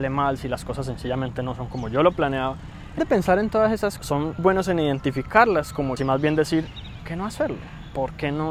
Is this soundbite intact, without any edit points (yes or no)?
no